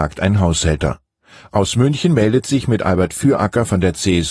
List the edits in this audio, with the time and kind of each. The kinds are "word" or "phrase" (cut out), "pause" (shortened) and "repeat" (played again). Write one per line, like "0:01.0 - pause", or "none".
none